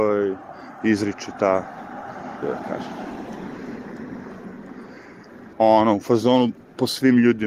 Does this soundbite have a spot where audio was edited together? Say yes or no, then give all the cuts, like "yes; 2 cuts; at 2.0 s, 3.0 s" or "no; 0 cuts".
yes; 2 cuts; at 2.4 s, 5.5 s